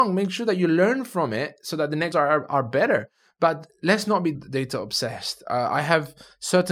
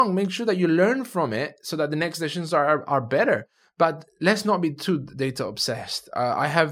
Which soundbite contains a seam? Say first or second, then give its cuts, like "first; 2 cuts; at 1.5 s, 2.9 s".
first; 2 cuts; at 2.1 s, 4.3 s